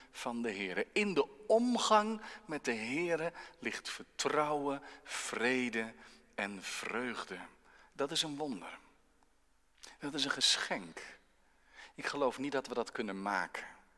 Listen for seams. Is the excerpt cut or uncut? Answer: uncut